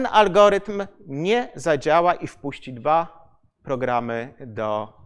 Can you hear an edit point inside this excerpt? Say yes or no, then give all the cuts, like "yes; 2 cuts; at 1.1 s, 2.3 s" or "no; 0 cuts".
no; 0 cuts